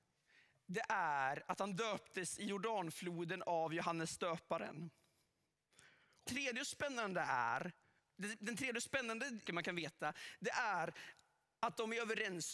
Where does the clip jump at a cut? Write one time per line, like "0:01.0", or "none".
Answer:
0:06.3
0:09.5